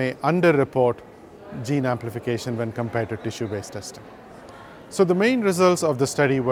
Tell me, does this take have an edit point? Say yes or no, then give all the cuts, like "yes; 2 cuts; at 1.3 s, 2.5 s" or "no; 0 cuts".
no; 0 cuts